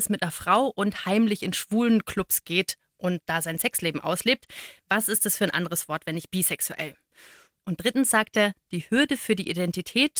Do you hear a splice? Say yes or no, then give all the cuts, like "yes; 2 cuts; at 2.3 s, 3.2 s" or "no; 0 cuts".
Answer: no; 0 cuts